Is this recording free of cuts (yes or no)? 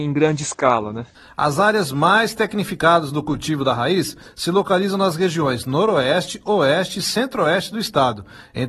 yes